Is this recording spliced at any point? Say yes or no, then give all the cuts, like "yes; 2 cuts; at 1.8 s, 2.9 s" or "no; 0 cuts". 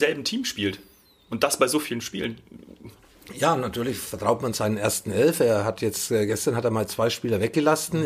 no; 0 cuts